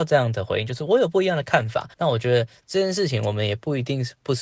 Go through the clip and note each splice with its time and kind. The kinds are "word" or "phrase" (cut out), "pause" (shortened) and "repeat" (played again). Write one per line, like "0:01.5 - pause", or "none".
0:01.9 - pause